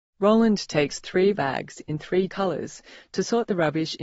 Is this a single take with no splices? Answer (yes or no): no